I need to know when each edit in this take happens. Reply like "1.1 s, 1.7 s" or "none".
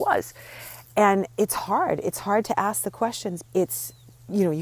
3.4 s